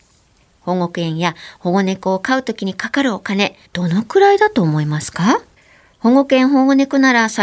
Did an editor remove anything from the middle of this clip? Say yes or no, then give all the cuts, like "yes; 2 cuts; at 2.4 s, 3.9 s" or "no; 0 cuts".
yes; 2 cuts; at 3.7 s, 5.6 s